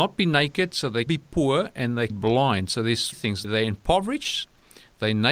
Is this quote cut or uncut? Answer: cut